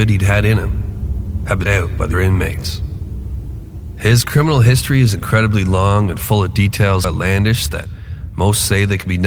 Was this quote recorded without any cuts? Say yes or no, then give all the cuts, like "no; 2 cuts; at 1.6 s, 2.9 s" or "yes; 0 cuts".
no; 3 cuts; at 1.6 s, 2.1 s, 7.0 s